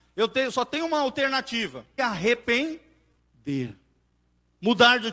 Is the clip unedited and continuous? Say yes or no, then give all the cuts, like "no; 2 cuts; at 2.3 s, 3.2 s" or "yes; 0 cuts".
no; 1 cut; at 2.0 s